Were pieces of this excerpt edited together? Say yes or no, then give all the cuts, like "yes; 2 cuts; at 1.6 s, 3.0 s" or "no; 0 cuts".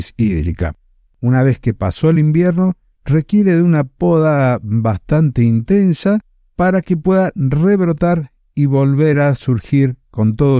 no; 0 cuts